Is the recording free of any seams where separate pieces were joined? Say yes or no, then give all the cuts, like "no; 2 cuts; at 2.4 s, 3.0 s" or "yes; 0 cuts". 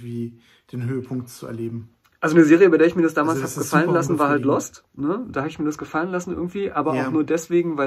yes; 0 cuts